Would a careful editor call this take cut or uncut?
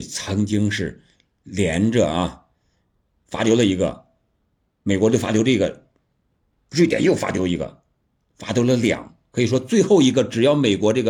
uncut